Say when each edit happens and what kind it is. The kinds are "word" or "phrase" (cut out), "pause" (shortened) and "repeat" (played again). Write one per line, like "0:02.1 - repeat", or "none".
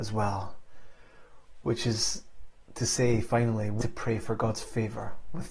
0:03.8 - word